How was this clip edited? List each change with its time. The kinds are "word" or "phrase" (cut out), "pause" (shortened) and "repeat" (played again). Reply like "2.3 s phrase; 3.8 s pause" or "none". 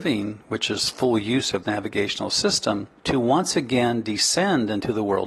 1.6 s word; 3.0 s pause